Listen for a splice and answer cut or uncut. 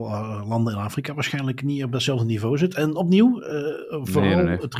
uncut